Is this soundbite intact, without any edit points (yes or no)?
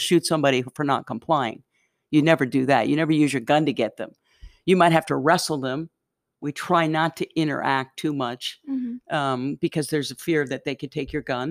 yes